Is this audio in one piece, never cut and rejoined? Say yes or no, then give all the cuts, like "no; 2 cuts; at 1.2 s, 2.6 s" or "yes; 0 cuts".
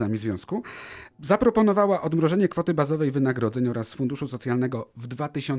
yes; 0 cuts